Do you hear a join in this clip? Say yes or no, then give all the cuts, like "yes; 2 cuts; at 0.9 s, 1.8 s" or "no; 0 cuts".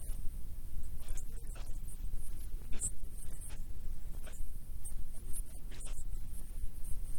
no; 0 cuts